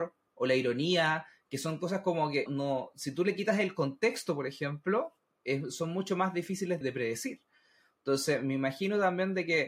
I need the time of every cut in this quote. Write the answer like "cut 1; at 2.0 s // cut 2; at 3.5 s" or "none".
cut 1; at 2.5 s // cut 2; at 6.8 s